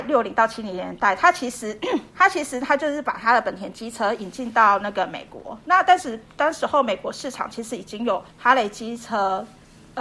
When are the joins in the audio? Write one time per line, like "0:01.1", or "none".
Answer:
0:02.1
0:08.3